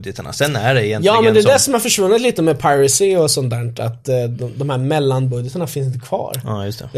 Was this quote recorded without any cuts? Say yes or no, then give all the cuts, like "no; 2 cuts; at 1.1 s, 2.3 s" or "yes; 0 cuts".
yes; 0 cuts